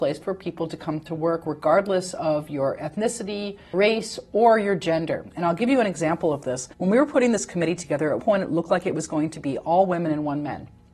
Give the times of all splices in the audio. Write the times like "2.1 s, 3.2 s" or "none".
3.7 s, 6.7 s, 8.2 s